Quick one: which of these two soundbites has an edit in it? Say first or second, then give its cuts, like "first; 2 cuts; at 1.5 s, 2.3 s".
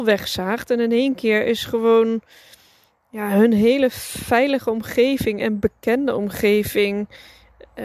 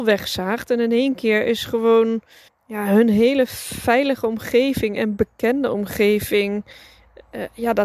second; 1 cut; at 2.5 s